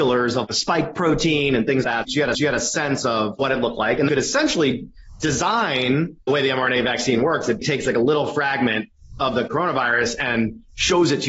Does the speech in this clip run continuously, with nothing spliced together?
no; 4 cuts; at 1.8 s, 2.3 s, 4.1 s, 7.6 s

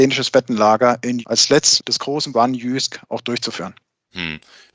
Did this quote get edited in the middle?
yes; 3 cuts; at 1.2 s, 1.8 s, 2.3 s

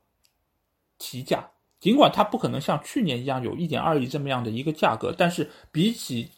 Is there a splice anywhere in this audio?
no; 0 cuts

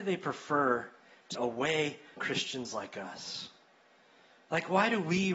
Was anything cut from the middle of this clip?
yes; 2 cuts; at 1.3 s, 2.2 s

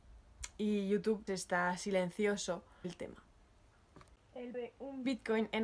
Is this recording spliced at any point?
yes; 3 cuts; at 1.3 s, 2.8 s, 4.5 s

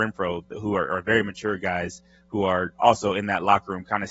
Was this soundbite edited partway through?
no; 0 cuts

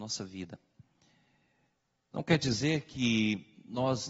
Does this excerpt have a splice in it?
no; 0 cuts

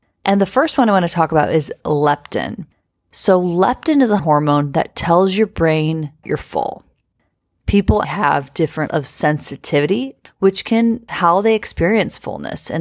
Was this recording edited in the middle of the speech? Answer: yes; 6 cuts; at 4.2 s, 6.2 s, 8.0 s, 8.9 s, 10.3 s, 11.1 s

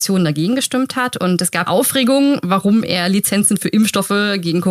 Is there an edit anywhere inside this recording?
yes; 1 cut; at 1.7 s

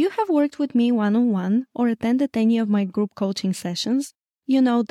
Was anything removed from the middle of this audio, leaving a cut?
no; 0 cuts

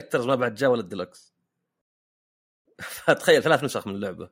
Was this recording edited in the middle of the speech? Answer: no; 0 cuts

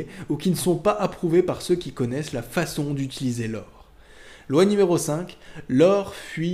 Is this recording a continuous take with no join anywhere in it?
yes; 0 cuts

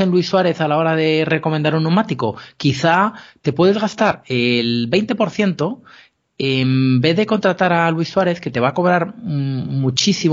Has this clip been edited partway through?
no; 0 cuts

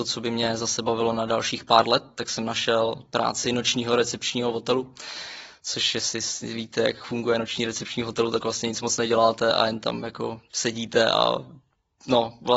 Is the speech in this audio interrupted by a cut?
no; 0 cuts

